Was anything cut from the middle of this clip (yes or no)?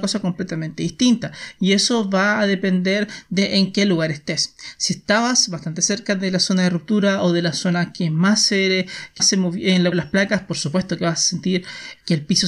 yes